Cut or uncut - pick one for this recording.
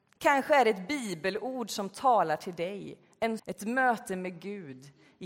cut